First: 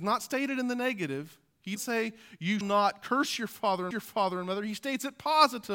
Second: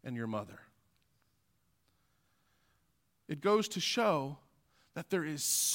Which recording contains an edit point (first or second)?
first